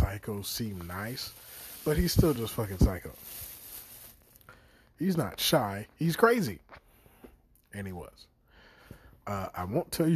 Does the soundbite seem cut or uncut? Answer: uncut